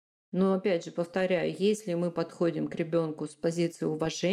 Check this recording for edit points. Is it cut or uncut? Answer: uncut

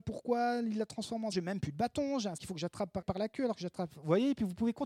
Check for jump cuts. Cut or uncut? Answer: cut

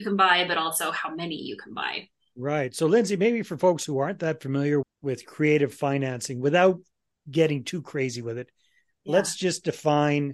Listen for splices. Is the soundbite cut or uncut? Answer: cut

